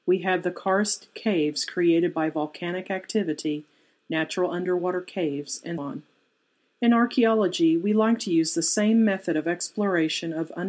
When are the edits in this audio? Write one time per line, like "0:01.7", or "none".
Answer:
0:05.8